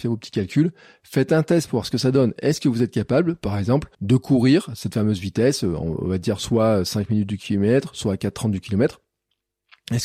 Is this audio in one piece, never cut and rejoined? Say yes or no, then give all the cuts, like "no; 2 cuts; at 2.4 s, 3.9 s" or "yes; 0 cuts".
no; 1 cut; at 3.9 s